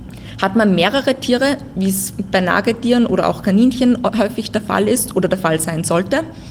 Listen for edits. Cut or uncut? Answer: uncut